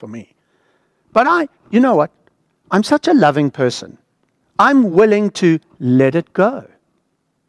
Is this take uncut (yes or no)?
yes